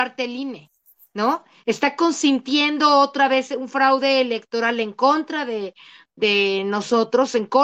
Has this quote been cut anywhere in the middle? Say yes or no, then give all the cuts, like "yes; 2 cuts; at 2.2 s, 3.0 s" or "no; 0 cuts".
no; 0 cuts